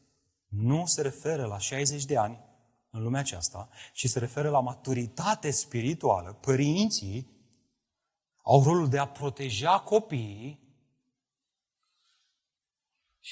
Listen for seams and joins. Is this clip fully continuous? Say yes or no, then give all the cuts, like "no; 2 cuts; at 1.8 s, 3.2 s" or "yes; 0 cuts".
yes; 0 cuts